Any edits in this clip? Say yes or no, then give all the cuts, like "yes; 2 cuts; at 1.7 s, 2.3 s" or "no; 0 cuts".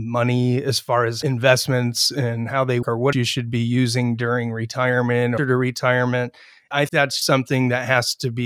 yes; 5 cuts; at 2.8 s, 3.1 s, 5.4 s, 6.9 s, 7.2 s